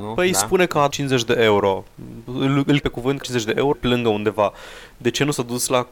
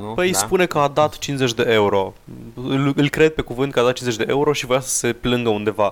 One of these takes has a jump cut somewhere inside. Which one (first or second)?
first